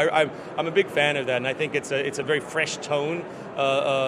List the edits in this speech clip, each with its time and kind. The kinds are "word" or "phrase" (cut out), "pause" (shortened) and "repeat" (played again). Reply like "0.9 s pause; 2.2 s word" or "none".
none